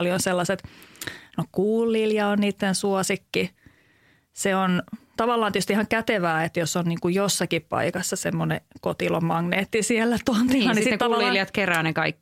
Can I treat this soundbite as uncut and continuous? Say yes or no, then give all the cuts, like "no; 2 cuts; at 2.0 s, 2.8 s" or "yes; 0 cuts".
yes; 0 cuts